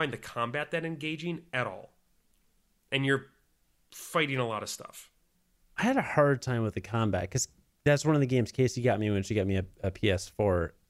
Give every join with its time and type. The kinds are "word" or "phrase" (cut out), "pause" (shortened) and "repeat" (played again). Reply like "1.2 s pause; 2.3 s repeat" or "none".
none